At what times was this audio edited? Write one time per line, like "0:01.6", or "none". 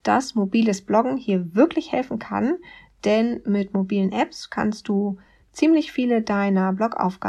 none